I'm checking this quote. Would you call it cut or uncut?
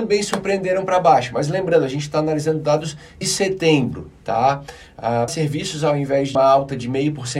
cut